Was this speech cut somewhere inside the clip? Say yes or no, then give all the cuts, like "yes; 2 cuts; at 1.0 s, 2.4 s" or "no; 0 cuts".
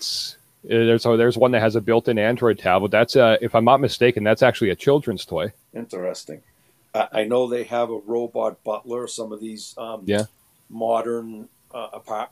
yes; 1 cut; at 5.6 s